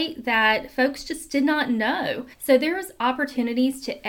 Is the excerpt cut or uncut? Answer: cut